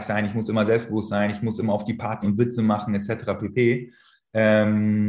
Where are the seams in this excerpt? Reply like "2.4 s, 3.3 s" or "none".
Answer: 2.2 s

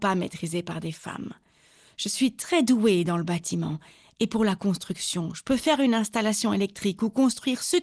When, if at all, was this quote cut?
none

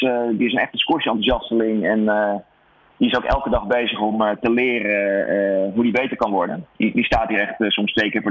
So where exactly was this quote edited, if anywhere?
none

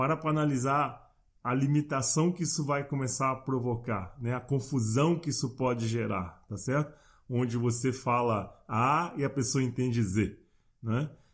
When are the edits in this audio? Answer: none

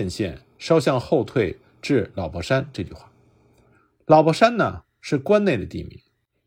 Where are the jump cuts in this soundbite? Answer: none

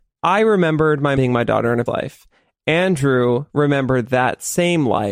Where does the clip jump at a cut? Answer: 1.2 s, 1.9 s

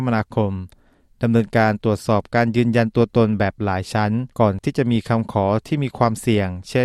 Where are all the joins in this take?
4.3 s

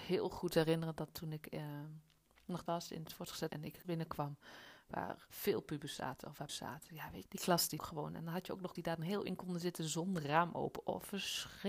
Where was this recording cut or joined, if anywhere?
2.7 s, 3.5 s, 3.8 s, 5.3 s, 6.5 s, 7.2 s, 7.8 s, 8.8 s, 9.3 s

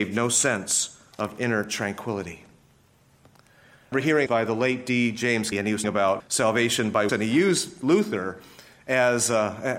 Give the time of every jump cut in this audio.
3.9 s, 4.3 s, 5.5 s, 5.8 s, 6.2 s, 7.1 s

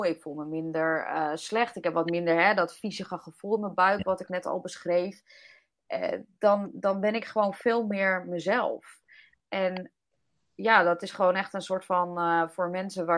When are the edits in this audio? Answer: none

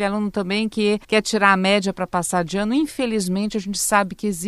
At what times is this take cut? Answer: 1.0 s

